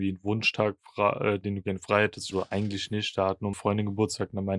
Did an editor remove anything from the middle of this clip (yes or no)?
yes